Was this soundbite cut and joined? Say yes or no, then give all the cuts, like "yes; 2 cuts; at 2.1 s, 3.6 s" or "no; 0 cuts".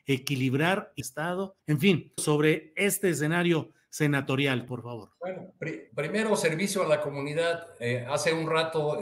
yes; 5 cuts; at 1.0 s, 1.6 s, 2.2 s, 4.7 s, 5.9 s